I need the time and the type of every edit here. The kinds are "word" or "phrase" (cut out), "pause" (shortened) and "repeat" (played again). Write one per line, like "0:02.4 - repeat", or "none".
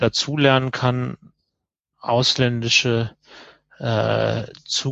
none

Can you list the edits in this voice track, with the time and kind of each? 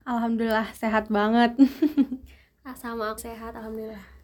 0:03.2 - phrase

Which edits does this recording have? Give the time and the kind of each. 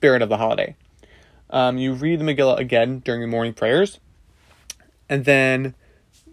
none

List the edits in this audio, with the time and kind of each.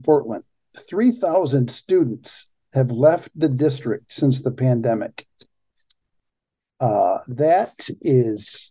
none

